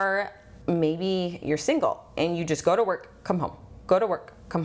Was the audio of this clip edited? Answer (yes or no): no